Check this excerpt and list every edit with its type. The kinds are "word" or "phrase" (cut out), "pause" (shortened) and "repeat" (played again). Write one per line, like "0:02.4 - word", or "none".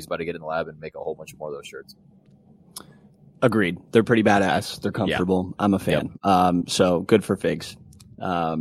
none